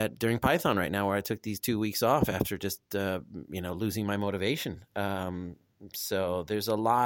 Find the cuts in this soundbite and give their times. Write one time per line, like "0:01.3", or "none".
none